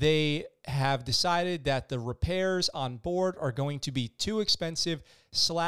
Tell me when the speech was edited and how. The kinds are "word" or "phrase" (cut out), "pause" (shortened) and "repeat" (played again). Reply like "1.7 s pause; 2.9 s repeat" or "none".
none